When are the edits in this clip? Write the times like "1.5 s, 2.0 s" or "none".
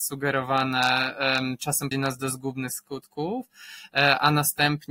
1.9 s